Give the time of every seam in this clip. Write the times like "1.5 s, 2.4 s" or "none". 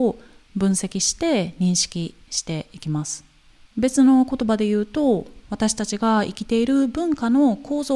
3.5 s, 5.4 s

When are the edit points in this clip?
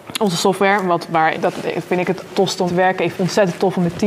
1.3 s, 2.3 s, 2.7 s, 3.1 s

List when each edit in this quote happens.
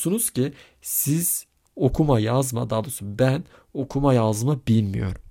none

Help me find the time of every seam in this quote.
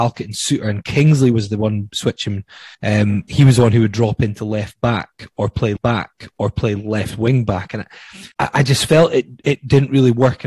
2.7 s, 5.8 s, 8.3 s

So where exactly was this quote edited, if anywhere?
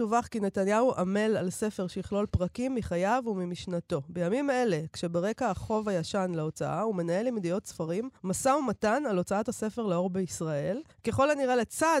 8.2 s, 10.9 s

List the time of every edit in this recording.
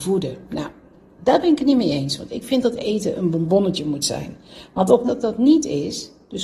5.1 s

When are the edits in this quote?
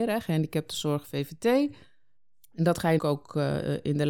3.0 s

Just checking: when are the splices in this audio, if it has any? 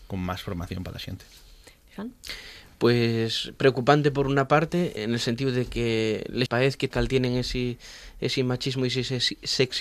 5.0 s, 6.5 s, 6.9 s

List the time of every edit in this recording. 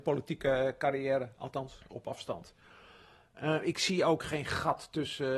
none

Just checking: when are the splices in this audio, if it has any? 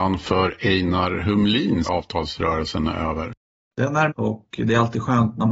1.8 s, 4.1 s

